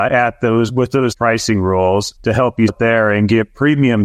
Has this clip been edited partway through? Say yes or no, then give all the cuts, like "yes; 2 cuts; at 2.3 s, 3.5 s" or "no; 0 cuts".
yes; 3 cuts; at 1.1 s, 2.2 s, 2.7 s